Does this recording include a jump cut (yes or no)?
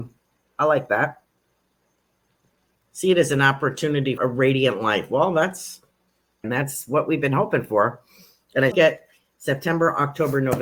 yes